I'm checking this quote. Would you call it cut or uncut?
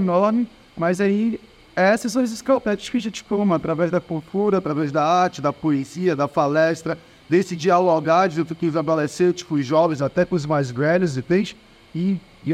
uncut